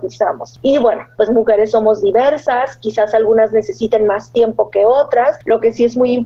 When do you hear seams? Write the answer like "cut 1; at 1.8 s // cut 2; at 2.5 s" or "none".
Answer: cut 1; at 1.3 s